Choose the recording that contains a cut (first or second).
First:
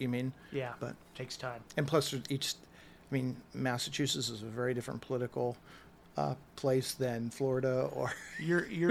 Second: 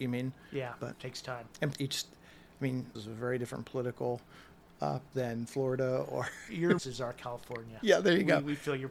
second